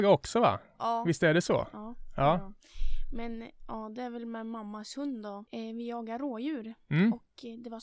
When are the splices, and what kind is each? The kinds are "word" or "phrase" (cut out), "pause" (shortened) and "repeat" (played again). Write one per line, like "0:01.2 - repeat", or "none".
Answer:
0:05.5 - pause

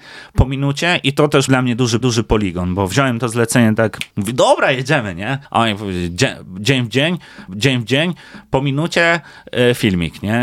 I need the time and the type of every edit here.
0:01.5 - word
0:02.0 - repeat
0:04.1 - pause
0:05.4 - pause
0:07.5 - repeat

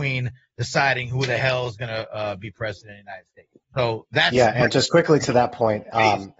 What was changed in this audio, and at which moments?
0:03.6 - pause

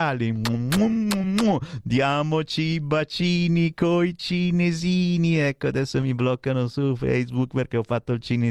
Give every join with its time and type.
none

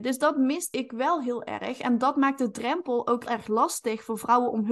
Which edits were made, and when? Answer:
0:03.3 - word

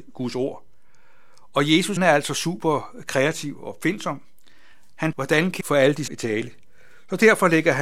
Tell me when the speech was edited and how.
0:02.0 - word
0:05.1 - word
0:05.6 - word
0:06.1 - word

